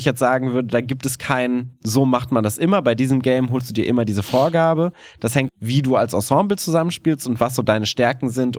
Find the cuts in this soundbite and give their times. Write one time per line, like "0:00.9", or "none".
0:05.5